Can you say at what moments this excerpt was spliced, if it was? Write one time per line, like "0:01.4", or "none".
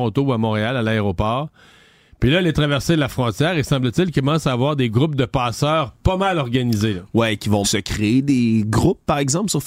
0:07.6